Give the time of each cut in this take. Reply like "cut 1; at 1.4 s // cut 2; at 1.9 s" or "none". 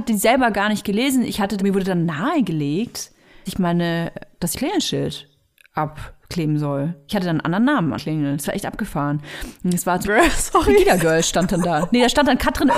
cut 1; at 1.6 s // cut 2; at 3.5 s // cut 3; at 4.5 s // cut 4; at 8.0 s // cut 5; at 10.0 s